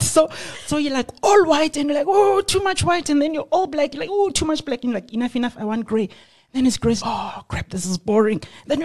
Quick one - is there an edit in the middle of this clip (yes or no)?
yes